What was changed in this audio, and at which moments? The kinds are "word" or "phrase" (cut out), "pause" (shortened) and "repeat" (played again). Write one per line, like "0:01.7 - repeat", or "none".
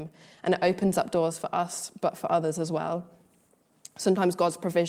none